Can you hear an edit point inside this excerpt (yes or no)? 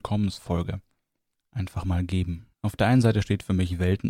yes